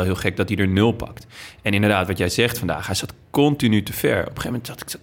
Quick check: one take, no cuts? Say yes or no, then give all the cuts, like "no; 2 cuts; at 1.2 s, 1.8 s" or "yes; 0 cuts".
yes; 0 cuts